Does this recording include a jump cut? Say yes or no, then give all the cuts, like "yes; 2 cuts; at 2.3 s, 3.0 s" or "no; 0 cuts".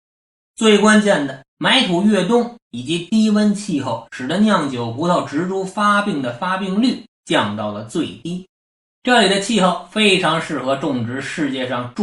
yes; 3 cuts; at 1.5 s, 7.1 s, 8.9 s